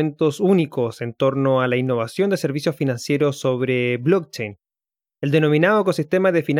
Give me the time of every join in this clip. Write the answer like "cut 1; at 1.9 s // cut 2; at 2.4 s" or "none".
none